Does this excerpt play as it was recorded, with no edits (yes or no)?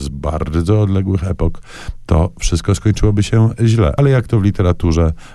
yes